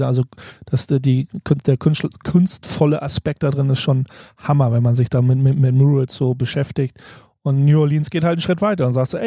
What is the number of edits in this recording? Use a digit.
0